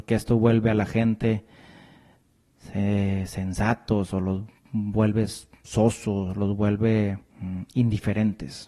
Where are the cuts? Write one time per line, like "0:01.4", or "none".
0:07.3